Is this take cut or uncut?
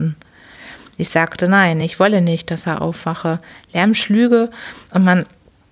uncut